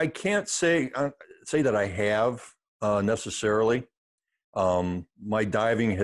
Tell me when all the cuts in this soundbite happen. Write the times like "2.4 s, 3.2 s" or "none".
none